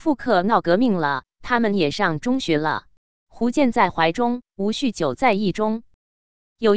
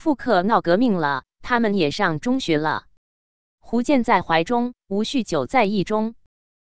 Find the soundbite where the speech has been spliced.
first; 1 cut; at 3.1 s

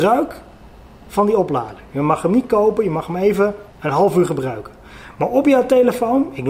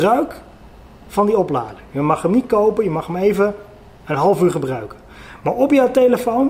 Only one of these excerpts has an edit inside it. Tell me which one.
first; 1 cut; at 3.7 s

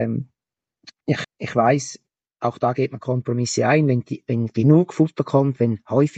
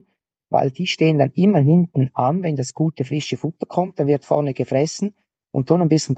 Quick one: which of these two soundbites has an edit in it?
first; 1 cut; at 1.2 s

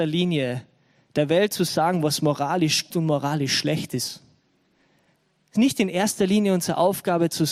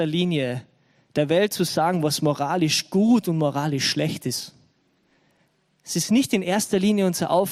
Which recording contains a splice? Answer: first; 2 cuts; at 2.9 s, 5.6 s

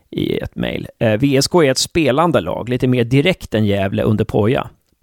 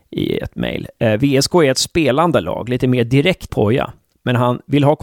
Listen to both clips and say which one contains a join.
second; 1 cut; at 3.5 s

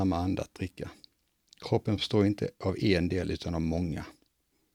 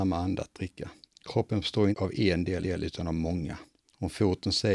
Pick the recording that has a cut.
second; 4 cuts; at 1.1 s, 1.9 s, 2.6 s, 3.8 s

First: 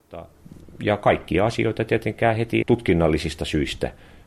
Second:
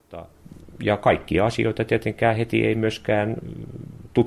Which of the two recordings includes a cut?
first; 1 cut; at 2.6 s

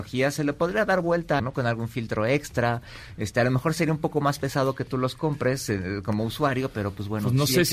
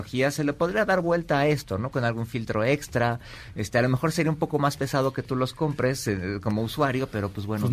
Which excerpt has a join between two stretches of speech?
first; 1 cut; at 1.4 s

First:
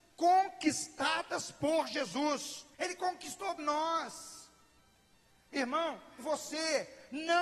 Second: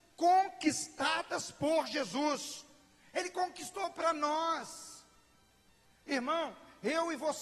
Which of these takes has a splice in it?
first; 3 cuts; at 2.7 s, 3.6 s, 6.2 s

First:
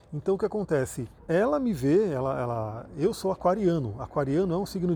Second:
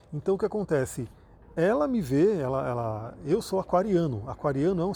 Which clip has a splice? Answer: first; 1 cut; at 1.2 s

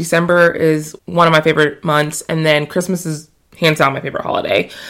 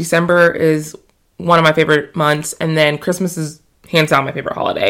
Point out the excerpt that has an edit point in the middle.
first; 1 cut; at 1.0 s

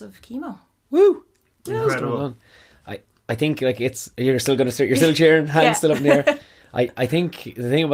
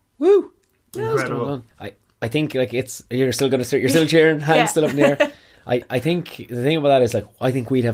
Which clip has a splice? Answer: second; 1 cut; at 1.7 s

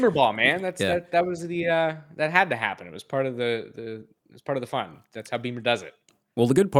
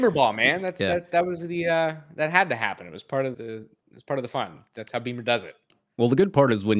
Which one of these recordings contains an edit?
second; 1 cut; at 3.3 s

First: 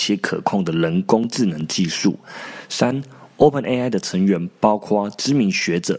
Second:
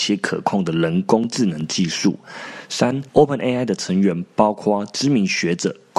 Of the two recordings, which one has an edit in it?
second; 1 cut; at 3.1 s

